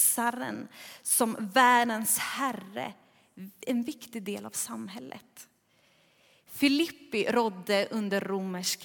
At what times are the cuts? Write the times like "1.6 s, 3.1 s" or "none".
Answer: none

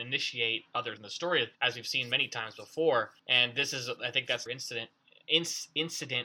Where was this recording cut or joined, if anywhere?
1.0 s, 1.5 s, 3.2 s, 4.5 s

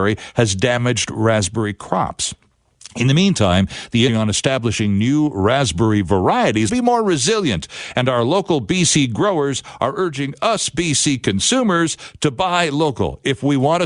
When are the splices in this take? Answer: 4.1 s, 6.7 s

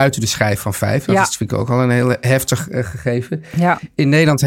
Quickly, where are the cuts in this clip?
none

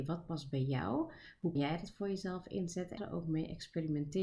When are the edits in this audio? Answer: 1.6 s, 3.0 s

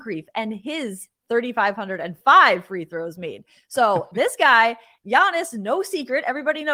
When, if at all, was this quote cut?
none

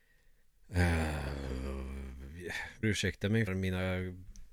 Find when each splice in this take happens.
2.8 s, 3.5 s

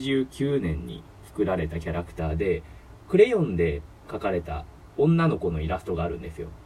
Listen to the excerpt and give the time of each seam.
1.1 s, 4.0 s

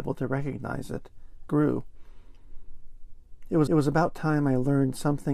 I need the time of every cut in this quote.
1.5 s, 3.7 s

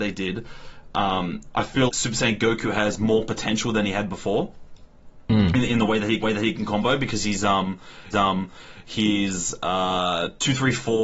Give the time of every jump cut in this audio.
1.9 s, 6.2 s, 8.1 s

